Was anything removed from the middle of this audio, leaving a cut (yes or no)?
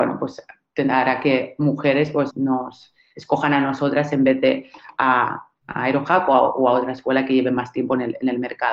yes